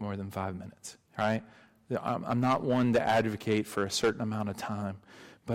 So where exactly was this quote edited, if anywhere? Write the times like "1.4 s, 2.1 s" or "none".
1.1 s